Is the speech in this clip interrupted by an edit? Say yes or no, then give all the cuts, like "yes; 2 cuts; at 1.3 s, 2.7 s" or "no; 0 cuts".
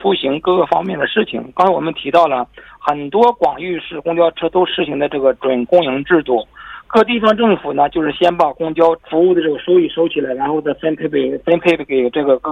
yes; 1 cut; at 9.0 s